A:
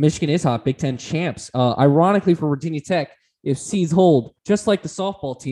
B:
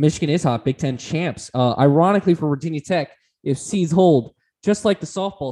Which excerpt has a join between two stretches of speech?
A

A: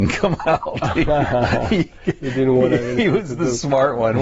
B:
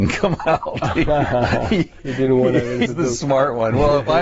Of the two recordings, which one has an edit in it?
B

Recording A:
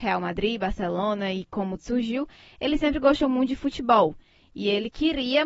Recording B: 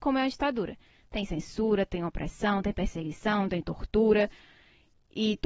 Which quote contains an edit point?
A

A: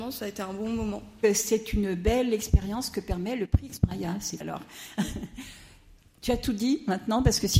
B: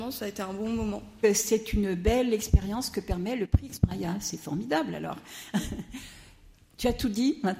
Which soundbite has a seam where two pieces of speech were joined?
A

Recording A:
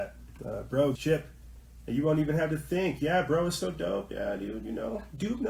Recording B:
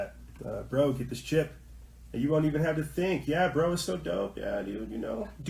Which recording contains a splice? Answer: A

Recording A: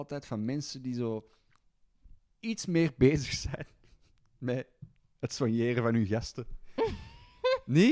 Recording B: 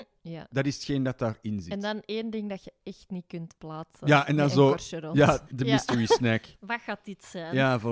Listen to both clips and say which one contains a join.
B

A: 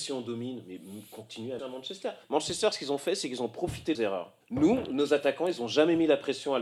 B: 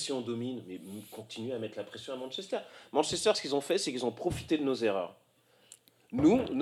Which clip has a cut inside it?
A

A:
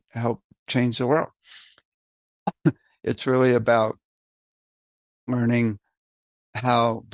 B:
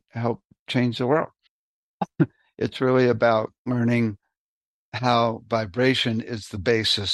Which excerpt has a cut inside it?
B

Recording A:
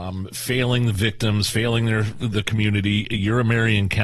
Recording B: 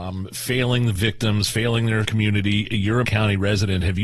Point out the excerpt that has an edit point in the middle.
B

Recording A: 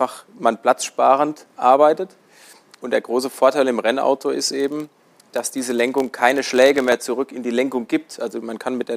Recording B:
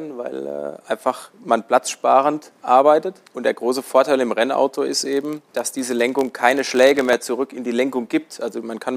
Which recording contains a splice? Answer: B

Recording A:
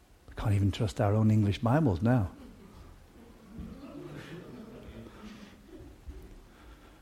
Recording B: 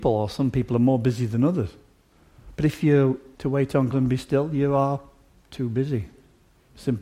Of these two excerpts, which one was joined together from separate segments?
B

